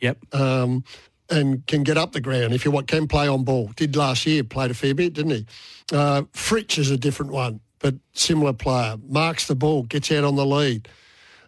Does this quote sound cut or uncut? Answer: cut